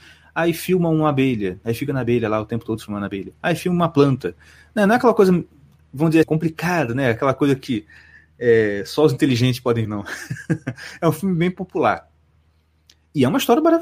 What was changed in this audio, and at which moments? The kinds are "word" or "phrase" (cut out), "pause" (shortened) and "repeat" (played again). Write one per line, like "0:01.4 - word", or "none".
0:06.2 - word
0:09.8 - word